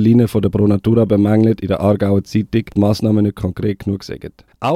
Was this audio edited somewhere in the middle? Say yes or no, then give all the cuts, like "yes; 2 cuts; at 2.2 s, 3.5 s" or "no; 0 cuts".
yes; 1 cut; at 2.7 s